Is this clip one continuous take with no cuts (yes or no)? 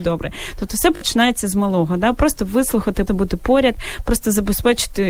no